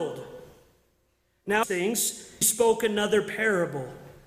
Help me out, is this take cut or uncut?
cut